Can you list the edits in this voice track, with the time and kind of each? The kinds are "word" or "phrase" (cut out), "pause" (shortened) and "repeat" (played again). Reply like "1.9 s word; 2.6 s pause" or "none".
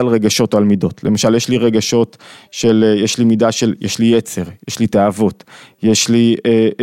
none